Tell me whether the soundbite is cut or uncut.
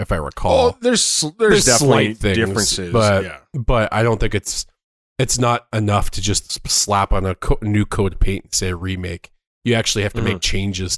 uncut